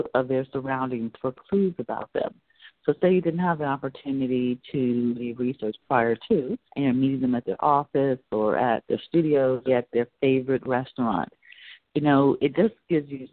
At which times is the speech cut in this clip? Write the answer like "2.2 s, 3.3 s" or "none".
5.1 s, 6.7 s, 8.8 s, 9.7 s

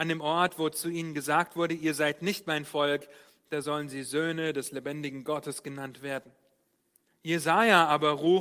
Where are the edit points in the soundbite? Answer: none

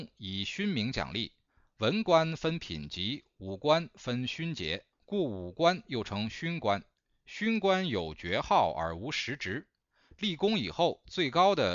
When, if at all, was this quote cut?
4.9 s

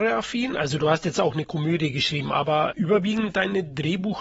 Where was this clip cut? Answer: none

